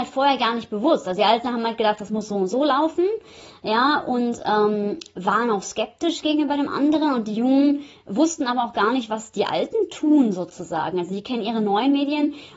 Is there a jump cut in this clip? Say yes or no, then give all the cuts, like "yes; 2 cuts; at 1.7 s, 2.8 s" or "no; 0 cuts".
no; 0 cuts